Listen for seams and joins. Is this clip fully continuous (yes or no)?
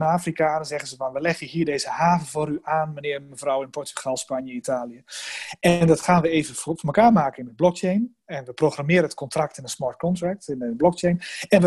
yes